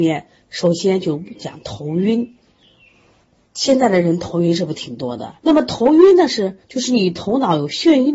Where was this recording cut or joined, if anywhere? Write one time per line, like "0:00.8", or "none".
0:05.4
0:06.6